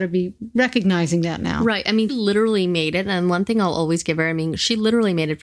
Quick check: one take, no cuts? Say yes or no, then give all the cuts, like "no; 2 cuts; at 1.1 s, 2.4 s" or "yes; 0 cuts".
no; 1 cut; at 2.1 s